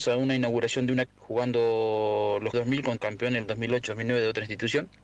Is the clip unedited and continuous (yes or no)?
no